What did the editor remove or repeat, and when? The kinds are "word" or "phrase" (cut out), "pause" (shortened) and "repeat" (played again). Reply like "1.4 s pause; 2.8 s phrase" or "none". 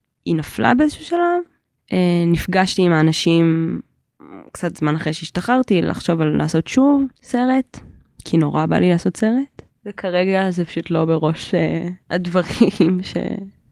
7.2 s pause; 9.7 s pause; 12.0 s pause